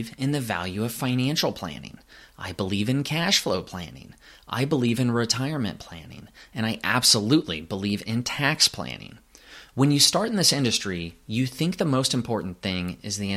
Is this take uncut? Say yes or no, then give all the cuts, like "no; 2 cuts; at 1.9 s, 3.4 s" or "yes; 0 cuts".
yes; 0 cuts